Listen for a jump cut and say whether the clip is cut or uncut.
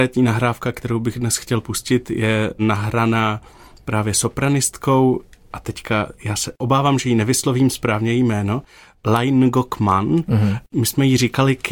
uncut